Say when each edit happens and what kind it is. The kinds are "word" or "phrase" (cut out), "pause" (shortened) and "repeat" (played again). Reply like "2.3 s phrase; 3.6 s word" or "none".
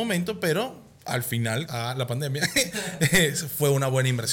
1.7 s word